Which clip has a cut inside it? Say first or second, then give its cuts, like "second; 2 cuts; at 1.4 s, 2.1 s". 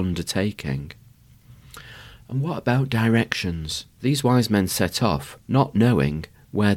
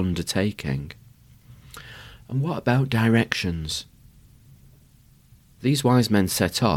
first; 2 cuts; at 3.9 s, 5.4 s